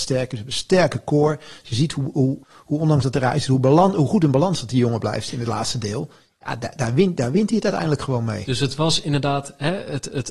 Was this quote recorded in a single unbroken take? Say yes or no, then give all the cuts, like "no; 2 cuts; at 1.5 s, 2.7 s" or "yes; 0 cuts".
no; 1 cut; at 2.4 s